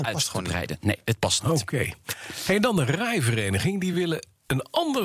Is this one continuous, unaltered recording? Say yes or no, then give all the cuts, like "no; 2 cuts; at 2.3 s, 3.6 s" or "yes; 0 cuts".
yes; 0 cuts